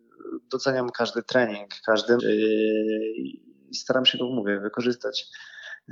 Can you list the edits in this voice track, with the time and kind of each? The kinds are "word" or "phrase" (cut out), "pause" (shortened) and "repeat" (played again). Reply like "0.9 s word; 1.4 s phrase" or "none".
0.9 s word; 2.2 s word